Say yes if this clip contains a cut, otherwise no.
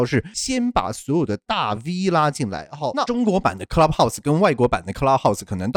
no